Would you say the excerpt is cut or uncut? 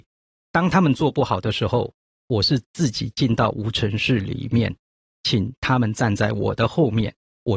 uncut